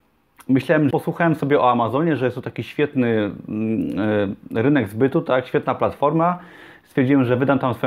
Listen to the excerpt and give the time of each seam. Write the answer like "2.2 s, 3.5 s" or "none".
0.9 s